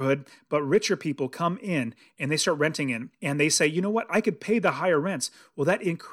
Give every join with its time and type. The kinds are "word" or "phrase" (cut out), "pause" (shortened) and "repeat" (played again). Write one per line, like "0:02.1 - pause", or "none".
0:03.1 - pause